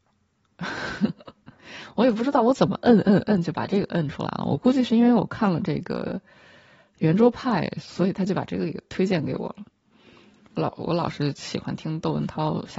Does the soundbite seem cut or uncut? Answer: uncut